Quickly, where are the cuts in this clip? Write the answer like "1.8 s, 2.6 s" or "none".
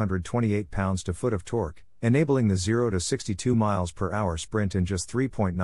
none